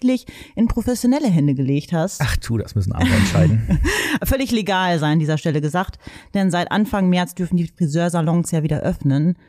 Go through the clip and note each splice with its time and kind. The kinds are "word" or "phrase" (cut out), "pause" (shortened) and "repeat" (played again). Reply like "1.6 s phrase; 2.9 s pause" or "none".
none